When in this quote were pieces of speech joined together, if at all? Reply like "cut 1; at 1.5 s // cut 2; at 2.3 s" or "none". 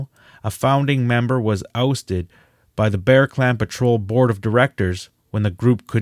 none

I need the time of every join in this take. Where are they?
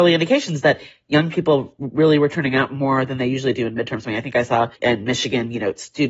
cut 1; at 4.8 s

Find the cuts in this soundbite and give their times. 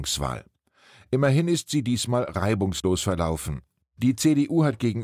none

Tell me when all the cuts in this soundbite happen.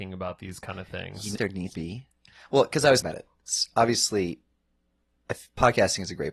cut 1; at 1.4 s // cut 2; at 1.7 s // cut 3; at 3.0 s

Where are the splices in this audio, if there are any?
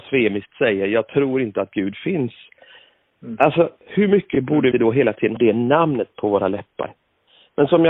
cut 1; at 4.7 s // cut 2; at 5.4 s

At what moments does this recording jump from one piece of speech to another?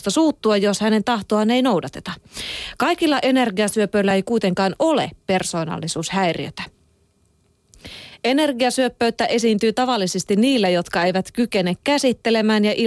none

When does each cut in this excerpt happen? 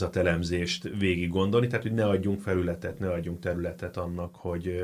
none

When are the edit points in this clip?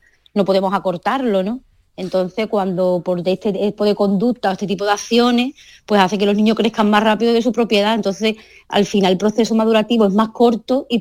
cut 1; at 3.8 s

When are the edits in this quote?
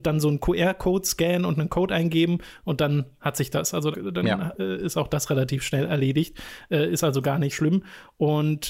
cut 1; at 3.9 s // cut 2; at 7.5 s

